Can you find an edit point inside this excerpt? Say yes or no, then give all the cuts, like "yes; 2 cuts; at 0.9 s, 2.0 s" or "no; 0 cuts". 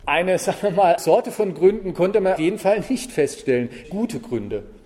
yes; 3 cuts; at 1.0 s, 2.4 s, 3.8 s